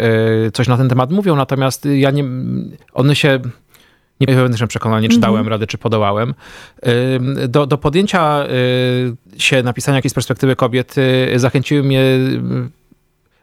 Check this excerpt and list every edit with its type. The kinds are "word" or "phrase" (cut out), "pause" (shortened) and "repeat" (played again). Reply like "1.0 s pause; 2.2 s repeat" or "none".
2.8 s pause; 4.3 s phrase; 9.3 s pause; 10.0 s word